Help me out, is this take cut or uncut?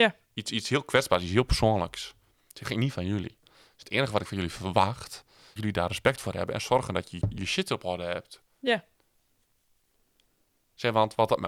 cut